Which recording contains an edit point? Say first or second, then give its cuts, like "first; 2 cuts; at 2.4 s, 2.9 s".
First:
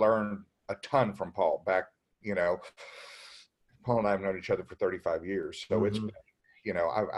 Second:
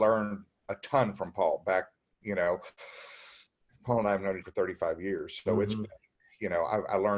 second; 1 cut; at 4.4 s